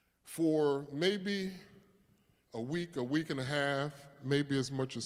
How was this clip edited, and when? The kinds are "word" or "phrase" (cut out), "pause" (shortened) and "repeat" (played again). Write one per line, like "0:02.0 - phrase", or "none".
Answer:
none